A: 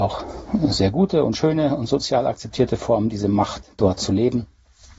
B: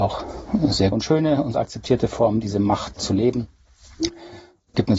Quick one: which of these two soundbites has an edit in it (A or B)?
B